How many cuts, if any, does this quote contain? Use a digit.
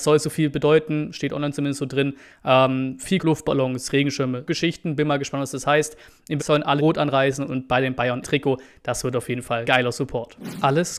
6